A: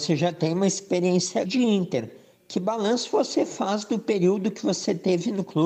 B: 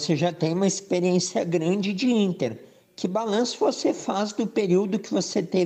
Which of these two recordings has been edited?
A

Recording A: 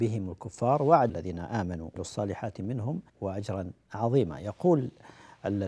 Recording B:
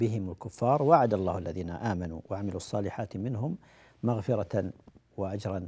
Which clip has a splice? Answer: A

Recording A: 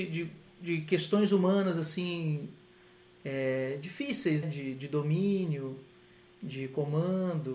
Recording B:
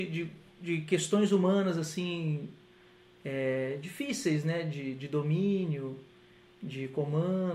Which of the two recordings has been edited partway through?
A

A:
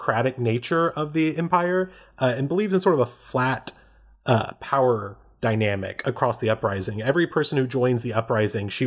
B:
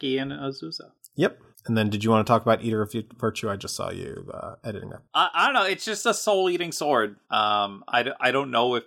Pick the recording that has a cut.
B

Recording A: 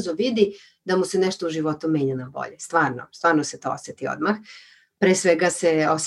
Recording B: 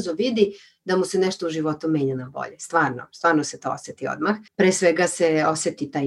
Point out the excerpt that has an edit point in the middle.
B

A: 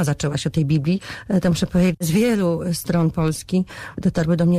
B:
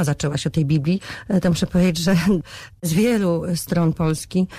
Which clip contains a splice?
A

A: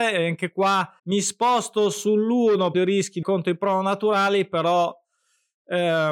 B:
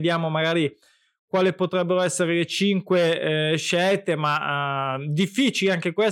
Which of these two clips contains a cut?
A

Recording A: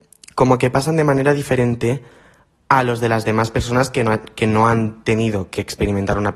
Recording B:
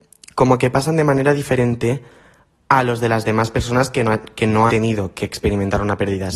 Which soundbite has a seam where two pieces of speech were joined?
B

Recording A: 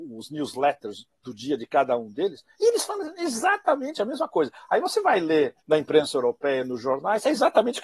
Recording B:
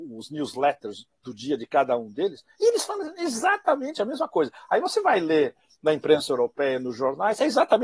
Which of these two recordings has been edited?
A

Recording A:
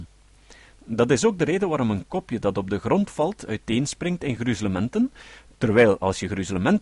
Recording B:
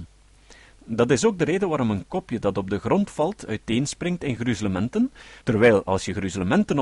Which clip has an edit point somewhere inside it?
B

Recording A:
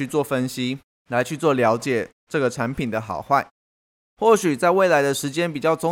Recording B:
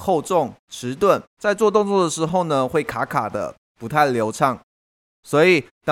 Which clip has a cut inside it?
B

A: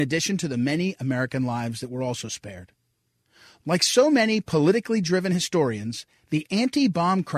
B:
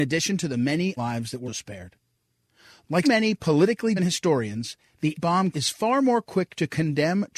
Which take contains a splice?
B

